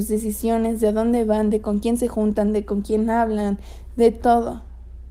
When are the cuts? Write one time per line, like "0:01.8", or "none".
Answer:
none